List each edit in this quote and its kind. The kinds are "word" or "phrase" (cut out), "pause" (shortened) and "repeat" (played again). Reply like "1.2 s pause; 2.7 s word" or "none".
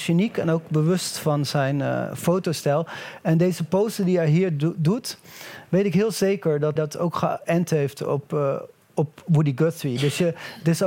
6.8 s word